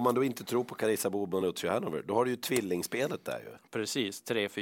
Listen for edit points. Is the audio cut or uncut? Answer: uncut